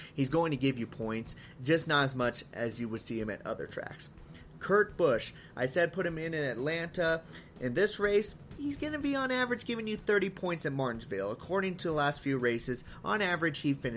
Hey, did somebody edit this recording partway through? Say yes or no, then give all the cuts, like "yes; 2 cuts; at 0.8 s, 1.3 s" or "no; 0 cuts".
no; 0 cuts